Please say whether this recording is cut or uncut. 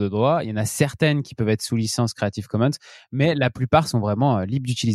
uncut